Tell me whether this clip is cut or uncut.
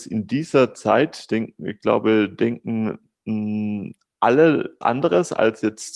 cut